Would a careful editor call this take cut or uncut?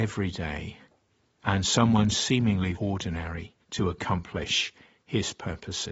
cut